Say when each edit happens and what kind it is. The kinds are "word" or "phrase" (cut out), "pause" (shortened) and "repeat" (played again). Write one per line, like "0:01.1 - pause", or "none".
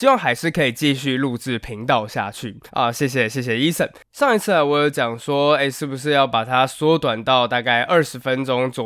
0:02.7 - pause